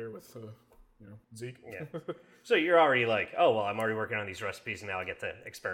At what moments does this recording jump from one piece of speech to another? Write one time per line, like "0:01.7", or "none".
0:01.2